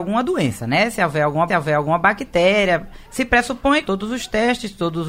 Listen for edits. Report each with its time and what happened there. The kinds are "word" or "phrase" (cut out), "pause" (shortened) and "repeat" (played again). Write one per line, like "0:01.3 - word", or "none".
0:01.5 - repeat
0:03.8 - phrase